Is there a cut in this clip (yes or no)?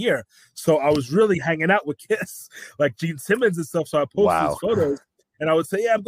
no